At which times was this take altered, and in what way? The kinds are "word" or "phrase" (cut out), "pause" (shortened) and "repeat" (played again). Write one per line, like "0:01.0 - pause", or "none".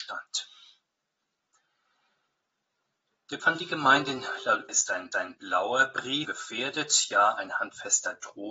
0:03.4 - word
0:04.7 - word
0:05.1 - repeat
0:06.2 - word